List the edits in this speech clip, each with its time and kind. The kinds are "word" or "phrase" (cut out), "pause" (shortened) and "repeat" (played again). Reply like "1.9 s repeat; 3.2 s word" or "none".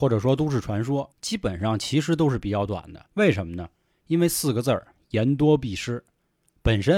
1.1 s pause; 3.1 s pause